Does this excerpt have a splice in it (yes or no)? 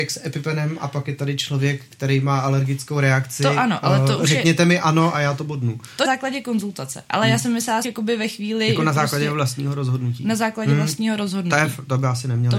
yes